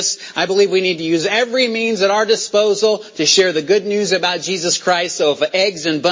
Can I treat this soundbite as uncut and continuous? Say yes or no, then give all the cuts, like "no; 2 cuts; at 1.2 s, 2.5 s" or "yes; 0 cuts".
yes; 0 cuts